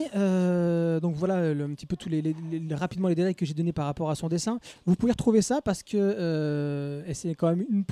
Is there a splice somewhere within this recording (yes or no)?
no